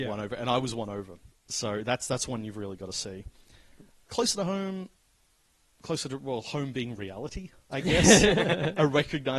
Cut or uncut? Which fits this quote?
uncut